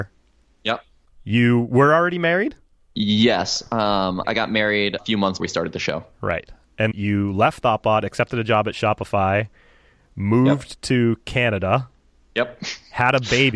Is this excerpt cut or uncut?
cut